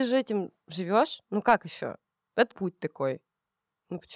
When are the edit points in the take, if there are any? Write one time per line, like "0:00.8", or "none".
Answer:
0:02.5